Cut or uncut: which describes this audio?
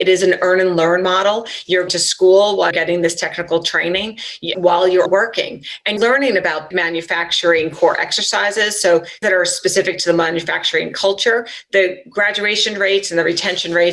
cut